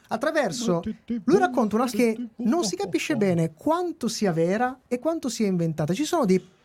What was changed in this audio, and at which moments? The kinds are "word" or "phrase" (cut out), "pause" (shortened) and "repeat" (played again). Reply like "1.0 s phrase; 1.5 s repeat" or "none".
1.9 s word